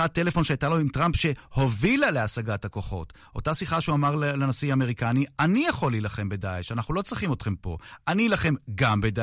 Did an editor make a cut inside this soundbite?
no; 0 cuts

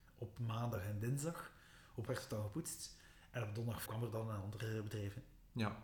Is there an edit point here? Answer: yes; 2 cuts; at 2.1 s, 3.9 s

